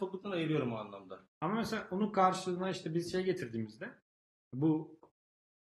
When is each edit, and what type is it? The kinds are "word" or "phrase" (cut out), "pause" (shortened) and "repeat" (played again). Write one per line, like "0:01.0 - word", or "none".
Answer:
none